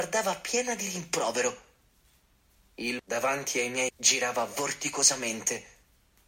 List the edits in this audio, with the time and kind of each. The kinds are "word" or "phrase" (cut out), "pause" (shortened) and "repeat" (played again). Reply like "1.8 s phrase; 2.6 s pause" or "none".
3.0 s word; 3.9 s word